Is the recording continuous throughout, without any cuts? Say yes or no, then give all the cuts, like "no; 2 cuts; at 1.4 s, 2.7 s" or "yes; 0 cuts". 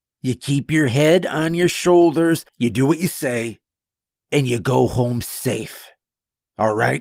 no; 1 cut; at 2.5 s